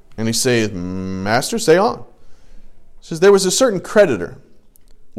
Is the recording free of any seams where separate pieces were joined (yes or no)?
yes